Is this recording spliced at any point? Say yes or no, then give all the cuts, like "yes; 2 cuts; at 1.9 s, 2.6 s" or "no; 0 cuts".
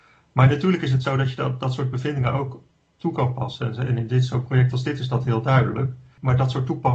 no; 0 cuts